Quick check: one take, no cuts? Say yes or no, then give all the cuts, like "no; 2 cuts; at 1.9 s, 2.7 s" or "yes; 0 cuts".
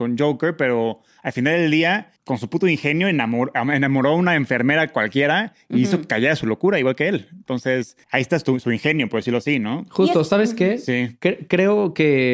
no; 2 cuts; at 2.2 s, 8.0 s